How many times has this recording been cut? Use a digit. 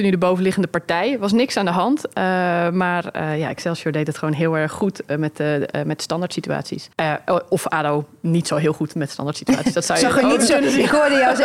1